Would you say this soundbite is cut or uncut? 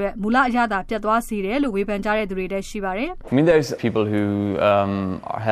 cut